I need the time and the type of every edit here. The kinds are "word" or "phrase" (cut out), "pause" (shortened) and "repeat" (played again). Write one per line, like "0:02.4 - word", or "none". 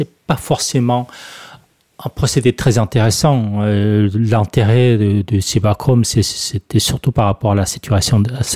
none